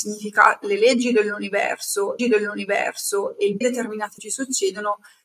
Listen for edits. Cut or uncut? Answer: cut